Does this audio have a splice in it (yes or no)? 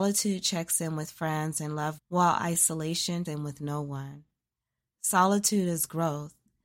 yes